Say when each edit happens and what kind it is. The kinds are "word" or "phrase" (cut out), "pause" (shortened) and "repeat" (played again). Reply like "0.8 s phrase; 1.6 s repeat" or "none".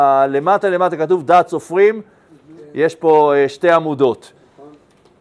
none